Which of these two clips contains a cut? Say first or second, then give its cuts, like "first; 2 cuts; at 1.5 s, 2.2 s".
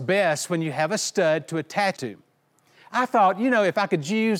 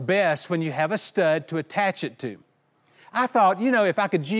first; 1 cut; at 2.0 s